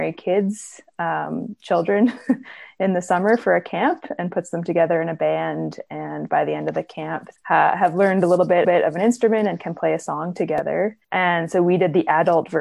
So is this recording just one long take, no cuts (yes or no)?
no